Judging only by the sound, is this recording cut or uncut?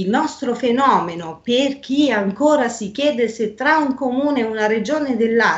uncut